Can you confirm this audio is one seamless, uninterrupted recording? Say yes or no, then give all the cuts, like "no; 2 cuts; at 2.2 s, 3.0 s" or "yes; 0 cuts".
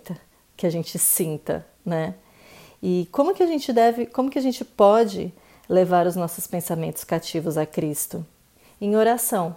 yes; 0 cuts